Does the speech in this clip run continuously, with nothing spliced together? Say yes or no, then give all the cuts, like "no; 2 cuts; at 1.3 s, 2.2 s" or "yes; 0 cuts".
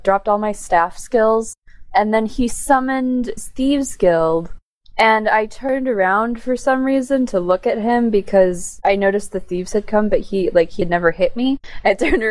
yes; 0 cuts